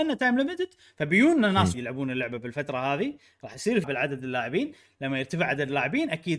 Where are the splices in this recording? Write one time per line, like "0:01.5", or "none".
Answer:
0:01.7
0:03.8